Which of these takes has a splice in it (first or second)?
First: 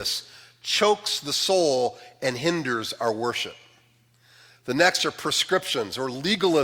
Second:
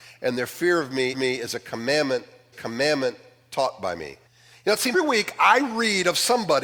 second